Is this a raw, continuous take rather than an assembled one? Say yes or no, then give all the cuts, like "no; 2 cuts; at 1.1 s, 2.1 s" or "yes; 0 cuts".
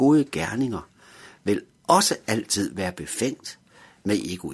yes; 0 cuts